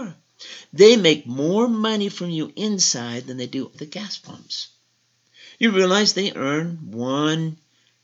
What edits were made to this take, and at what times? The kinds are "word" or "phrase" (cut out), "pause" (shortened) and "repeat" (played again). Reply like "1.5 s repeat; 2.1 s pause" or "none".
3.7 s word; 6.3 s word